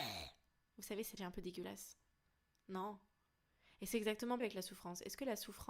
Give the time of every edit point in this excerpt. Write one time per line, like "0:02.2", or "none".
0:01.2
0:04.4